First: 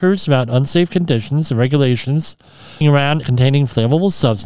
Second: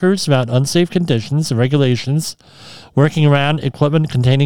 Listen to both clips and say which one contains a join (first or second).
first